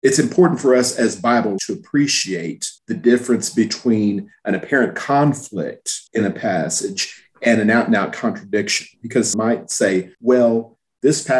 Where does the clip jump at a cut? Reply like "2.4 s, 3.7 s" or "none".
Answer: 1.6 s, 2.8 s, 6.1 s, 9.3 s, 10.1 s